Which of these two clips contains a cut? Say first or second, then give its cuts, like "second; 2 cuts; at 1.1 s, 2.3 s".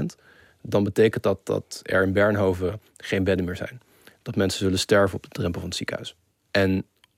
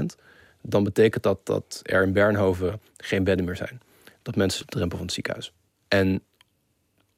second; 1 cut; at 4.6 s